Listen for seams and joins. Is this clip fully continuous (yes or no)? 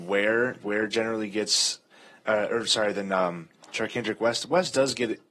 yes